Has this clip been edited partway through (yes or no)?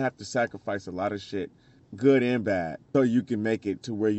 yes